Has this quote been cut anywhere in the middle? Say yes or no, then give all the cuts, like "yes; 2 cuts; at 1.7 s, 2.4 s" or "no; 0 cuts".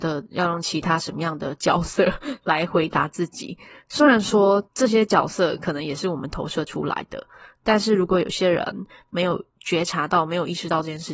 yes; 1 cut; at 4.7 s